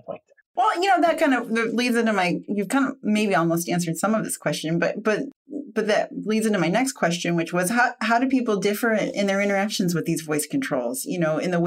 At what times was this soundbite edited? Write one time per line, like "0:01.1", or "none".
none